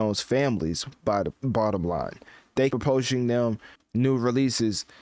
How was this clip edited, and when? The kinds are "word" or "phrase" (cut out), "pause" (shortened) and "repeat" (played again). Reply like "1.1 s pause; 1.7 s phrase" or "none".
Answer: 2.7 s word; 3.7 s word